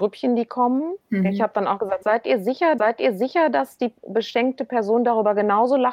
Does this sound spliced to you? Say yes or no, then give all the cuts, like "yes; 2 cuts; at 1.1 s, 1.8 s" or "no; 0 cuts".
yes; 2 cuts; at 1.0 s, 2.8 s